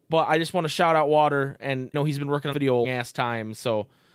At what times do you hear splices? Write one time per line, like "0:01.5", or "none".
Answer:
0:01.9
0:02.5
0:02.8